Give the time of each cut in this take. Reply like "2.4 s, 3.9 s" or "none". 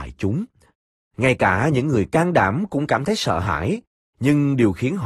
none